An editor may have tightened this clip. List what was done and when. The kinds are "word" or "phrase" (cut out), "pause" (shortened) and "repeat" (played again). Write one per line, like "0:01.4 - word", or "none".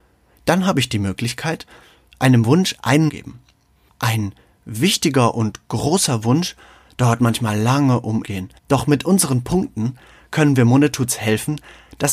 0:03.1 - phrase
0:08.2 - phrase
0:08.6 - pause